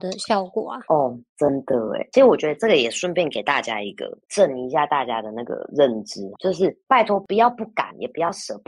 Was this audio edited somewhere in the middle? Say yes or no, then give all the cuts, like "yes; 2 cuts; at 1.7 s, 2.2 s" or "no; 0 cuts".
yes; 1 cut; at 6.4 s